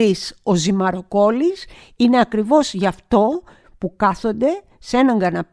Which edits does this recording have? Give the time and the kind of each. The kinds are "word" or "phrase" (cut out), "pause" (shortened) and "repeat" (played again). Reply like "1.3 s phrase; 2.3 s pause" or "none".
none